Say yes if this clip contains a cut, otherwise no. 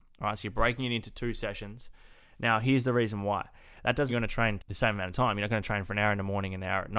yes